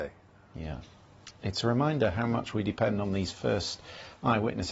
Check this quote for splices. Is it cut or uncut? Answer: uncut